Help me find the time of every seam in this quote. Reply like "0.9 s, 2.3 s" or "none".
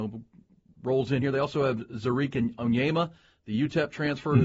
none